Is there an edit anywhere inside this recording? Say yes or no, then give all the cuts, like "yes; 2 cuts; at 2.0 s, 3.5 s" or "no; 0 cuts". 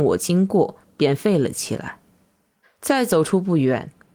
yes; 1 cut; at 2.6 s